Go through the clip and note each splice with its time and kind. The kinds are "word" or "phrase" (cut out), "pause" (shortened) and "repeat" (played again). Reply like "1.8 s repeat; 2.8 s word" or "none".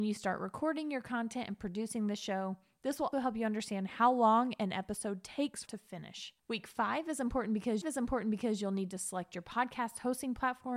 3.1 s word; 5.7 s phrase; 6.4 s pause; 7.8 s repeat